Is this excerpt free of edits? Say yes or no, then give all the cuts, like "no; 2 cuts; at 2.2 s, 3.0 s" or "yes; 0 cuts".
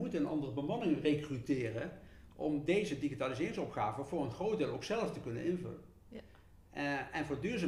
yes; 0 cuts